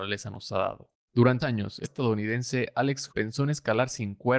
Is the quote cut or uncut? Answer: cut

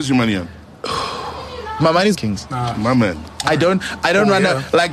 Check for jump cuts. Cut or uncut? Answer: cut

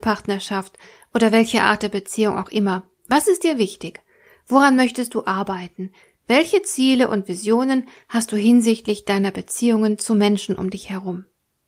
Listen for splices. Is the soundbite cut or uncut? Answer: uncut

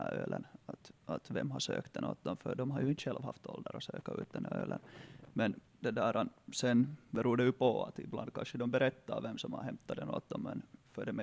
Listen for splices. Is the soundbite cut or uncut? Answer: cut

